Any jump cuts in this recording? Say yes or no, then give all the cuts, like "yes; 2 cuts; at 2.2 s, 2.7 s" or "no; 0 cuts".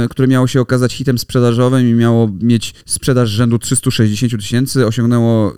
yes; 1 cut; at 2.8 s